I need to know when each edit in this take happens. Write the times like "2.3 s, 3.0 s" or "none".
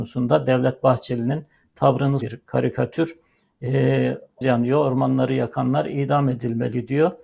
2.2 s, 4.4 s